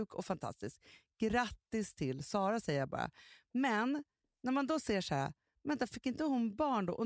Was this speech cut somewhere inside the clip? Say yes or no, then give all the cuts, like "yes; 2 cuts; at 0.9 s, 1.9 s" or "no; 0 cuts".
no; 0 cuts